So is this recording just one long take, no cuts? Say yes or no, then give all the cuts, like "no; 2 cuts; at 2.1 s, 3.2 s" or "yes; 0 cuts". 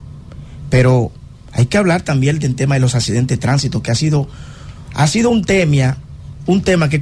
yes; 0 cuts